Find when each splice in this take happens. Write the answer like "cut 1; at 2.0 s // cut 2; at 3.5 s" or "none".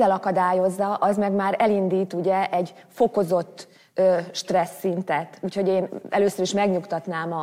none